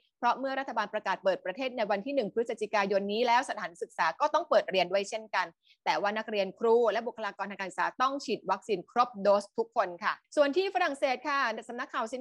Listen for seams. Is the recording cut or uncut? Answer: uncut